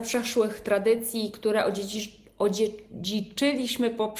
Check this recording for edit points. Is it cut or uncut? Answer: uncut